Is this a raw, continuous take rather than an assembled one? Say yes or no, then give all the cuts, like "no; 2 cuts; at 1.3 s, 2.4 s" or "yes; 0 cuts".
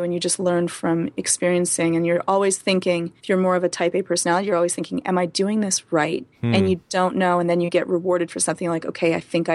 no; 2 cuts; at 3.2 s, 6.3 s